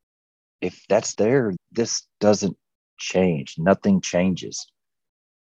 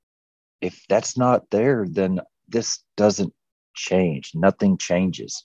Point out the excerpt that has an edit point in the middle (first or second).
first